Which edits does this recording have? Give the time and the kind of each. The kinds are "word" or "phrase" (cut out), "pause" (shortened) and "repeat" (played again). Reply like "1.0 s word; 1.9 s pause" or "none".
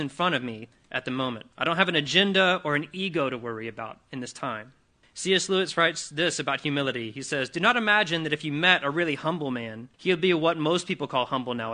1.5 s pause; 5.0 s pause; 9.9 s pause